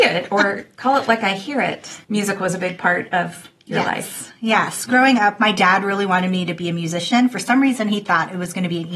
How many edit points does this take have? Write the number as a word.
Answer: one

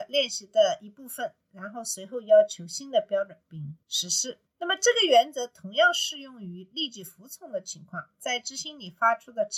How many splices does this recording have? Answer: one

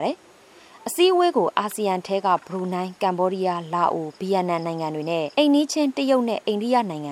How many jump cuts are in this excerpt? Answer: one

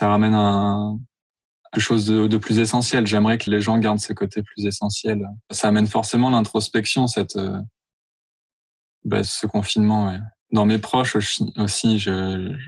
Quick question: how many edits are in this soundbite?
five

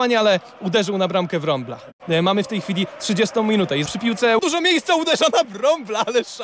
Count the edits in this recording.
three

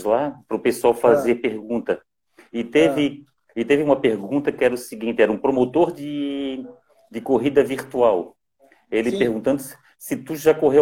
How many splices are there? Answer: zero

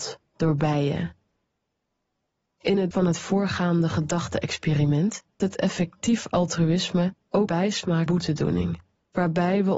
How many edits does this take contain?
four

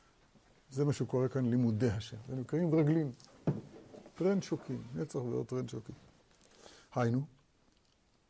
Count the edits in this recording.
zero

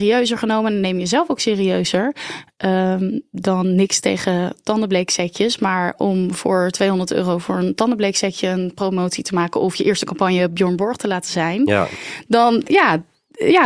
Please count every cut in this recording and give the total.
zero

